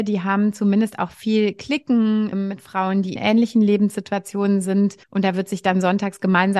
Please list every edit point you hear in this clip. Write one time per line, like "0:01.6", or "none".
0:02.3
0:03.2
0:05.0